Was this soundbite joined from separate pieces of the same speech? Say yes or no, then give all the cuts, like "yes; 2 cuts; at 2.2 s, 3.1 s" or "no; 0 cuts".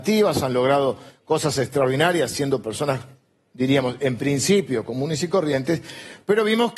no; 0 cuts